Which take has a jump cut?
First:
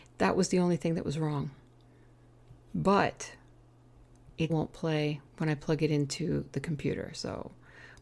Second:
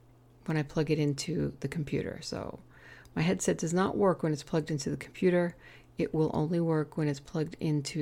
first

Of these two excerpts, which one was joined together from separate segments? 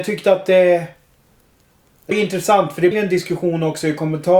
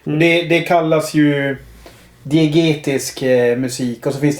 first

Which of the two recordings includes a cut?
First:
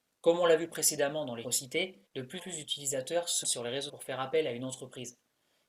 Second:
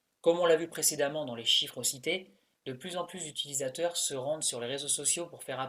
first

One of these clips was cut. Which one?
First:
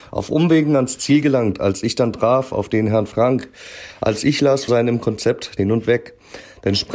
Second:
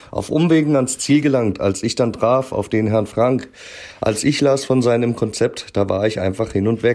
first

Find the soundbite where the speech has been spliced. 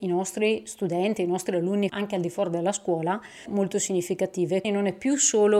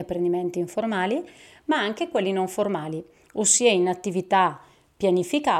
first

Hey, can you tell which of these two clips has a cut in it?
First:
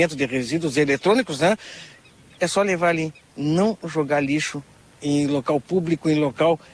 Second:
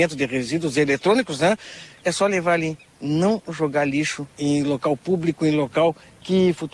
second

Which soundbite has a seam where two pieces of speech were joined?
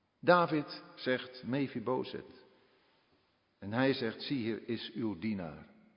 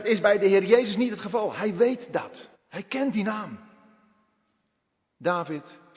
second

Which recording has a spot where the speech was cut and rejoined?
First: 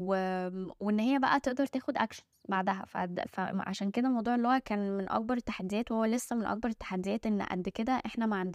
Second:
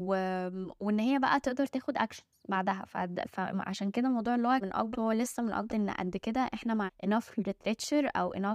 second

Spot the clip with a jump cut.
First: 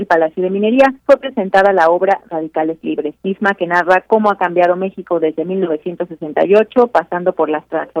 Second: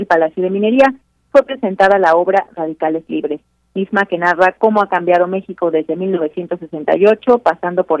first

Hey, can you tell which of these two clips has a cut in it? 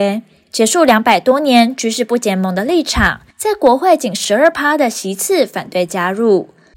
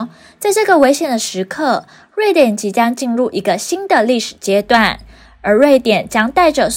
first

